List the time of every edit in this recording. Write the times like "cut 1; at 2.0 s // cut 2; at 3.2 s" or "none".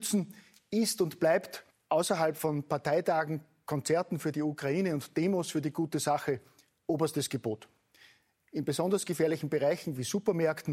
cut 1; at 1.7 s